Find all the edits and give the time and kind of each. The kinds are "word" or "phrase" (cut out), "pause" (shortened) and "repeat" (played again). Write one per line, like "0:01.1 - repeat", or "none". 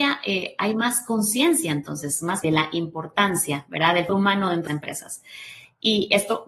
0:02.4 - phrase
0:04.1 - word
0:04.7 - phrase